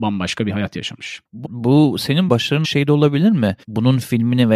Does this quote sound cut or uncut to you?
cut